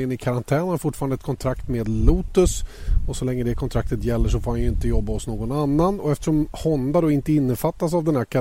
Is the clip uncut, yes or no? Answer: yes